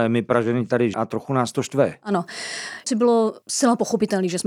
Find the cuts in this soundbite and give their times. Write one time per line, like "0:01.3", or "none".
0:00.9
0:02.9
0:03.4